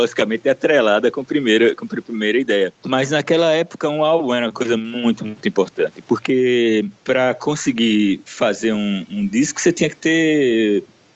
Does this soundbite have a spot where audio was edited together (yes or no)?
no